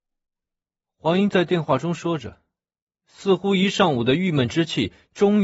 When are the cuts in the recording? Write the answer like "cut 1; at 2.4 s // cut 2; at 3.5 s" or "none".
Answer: none